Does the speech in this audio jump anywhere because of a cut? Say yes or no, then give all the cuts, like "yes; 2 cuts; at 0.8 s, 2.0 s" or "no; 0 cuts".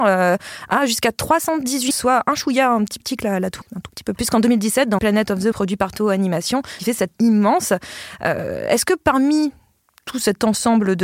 yes; 8 cuts; at 1.9 s, 3.0 s, 3.6 s, 4.2 s, 5.0 s, 5.5 s, 6.8 s, 7.1 s